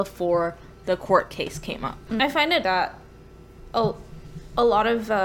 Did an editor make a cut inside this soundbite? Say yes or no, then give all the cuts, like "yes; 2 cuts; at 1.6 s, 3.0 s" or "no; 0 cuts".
yes; 1 cut; at 2.6 s